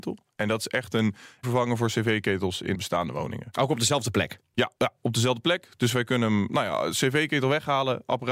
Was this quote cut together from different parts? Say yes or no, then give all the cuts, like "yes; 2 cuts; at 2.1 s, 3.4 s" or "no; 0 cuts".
yes; 3 cuts; at 1.4 s, 2.7 s, 4.8 s